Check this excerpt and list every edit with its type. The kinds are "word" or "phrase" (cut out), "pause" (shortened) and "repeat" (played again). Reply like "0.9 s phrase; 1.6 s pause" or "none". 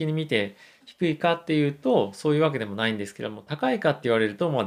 none